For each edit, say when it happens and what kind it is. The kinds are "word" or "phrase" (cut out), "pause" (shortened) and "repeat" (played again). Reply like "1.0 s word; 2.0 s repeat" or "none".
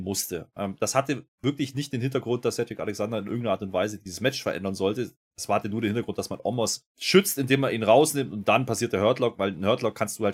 6.9 s pause